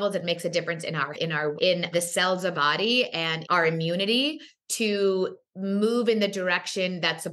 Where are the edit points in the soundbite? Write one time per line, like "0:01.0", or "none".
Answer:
0:01.1
0:01.6
0:01.9
0:02.5
0:03.4